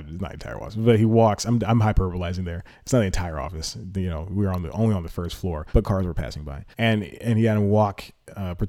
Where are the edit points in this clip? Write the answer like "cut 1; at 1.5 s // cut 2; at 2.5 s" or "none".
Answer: cut 1; at 5.7 s // cut 2; at 6.7 s